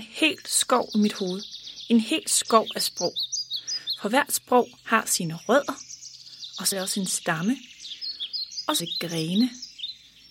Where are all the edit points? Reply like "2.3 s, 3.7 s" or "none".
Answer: 4.8 s, 6.7 s, 8.8 s